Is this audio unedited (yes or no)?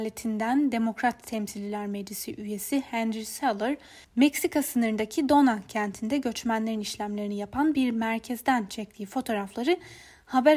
yes